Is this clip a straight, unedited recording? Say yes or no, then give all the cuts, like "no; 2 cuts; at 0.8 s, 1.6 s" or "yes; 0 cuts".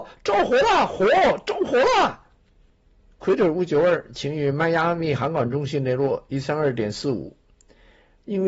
yes; 0 cuts